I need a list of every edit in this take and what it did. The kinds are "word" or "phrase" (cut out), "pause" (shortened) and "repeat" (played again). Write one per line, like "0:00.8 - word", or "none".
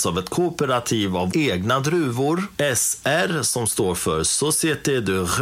0:01.3 - word